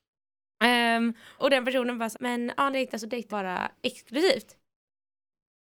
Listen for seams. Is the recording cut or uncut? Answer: cut